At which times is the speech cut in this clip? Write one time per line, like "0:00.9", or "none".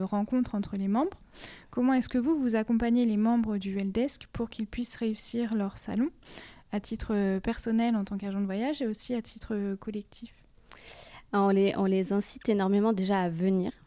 none